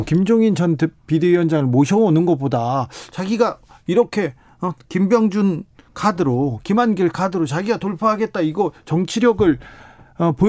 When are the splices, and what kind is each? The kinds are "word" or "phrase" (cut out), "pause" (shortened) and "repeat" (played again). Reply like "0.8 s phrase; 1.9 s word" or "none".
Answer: none